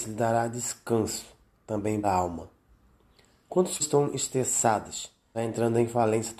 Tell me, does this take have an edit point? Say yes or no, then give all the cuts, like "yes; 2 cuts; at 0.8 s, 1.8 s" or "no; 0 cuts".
yes; 3 cuts; at 2.0 s, 3.8 s, 5.3 s